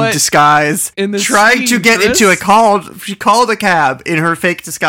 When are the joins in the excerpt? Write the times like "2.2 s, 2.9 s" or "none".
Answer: 0.9 s, 2.4 s